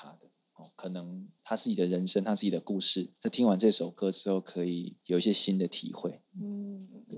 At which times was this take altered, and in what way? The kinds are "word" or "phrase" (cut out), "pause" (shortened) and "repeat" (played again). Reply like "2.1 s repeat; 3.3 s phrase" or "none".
1.4 s pause; 3.2 s pause; 5.0 s pause; 6.3 s pause